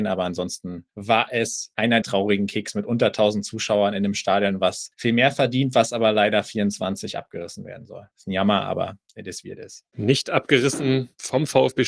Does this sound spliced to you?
yes; 1 cut; at 2.0 s

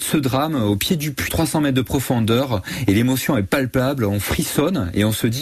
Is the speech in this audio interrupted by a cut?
yes; 1 cut; at 1.3 s

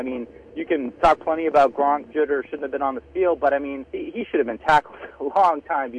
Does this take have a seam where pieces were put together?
yes; 3 cuts; at 1.0 s, 2.1 s, 3.9 s

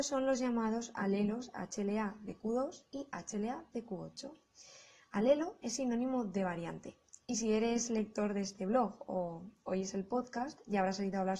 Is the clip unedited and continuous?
yes; 0 cuts

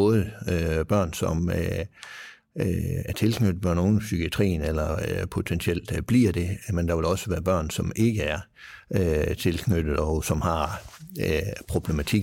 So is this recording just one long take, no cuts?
yes; 0 cuts

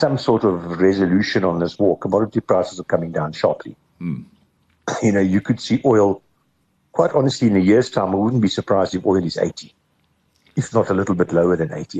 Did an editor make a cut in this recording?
no; 0 cuts

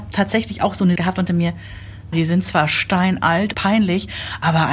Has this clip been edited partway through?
yes; 4 cuts; at 1.0 s, 1.3 s, 2.1 s, 3.5 s

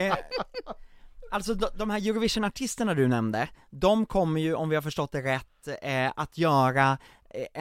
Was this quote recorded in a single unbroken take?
yes; 0 cuts

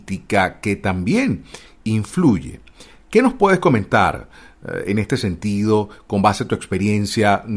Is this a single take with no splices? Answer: yes; 0 cuts

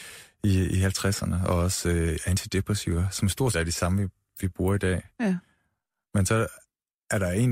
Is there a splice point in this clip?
yes; 1 cut; at 3.5 s

